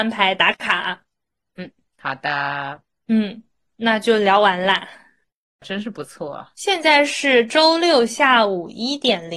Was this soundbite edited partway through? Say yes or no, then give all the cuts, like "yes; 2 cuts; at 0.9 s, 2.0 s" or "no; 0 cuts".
no; 0 cuts